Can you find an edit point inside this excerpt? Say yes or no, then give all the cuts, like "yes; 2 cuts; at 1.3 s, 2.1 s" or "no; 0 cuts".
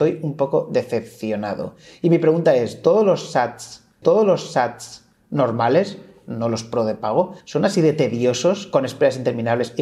yes; 2 cuts; at 4.0 s, 7.4 s